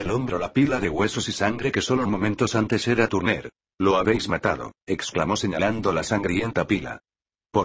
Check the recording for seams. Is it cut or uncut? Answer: cut